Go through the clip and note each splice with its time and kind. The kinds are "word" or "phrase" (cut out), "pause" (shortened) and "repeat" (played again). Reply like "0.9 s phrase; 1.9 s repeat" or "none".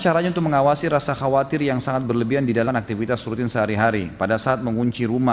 2.7 s word